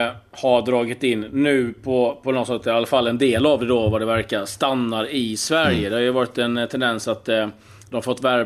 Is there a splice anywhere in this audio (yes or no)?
no